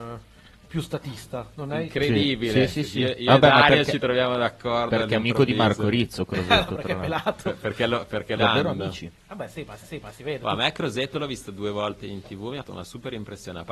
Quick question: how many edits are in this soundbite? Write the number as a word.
three